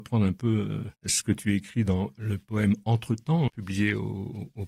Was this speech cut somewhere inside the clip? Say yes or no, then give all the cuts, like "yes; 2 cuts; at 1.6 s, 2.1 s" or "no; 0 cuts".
yes; 2 cuts; at 0.9 s, 3.5 s